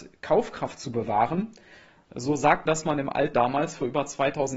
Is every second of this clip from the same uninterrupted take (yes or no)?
no